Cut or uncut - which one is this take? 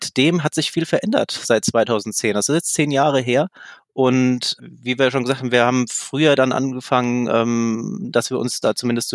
cut